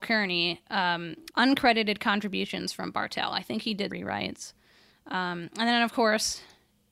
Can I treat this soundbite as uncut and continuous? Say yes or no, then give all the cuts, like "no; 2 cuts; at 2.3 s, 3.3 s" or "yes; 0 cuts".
no; 2 cuts; at 1.3 s, 3.9 s